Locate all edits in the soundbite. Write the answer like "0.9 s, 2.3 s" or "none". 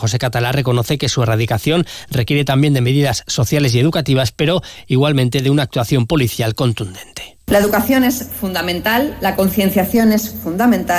7.4 s